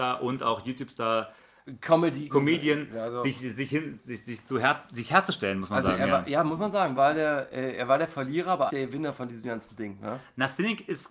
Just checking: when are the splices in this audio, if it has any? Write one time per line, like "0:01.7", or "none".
0:02.3
0:04.0
0:06.9
0:08.7